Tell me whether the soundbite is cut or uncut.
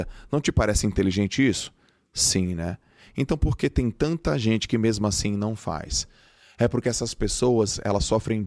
uncut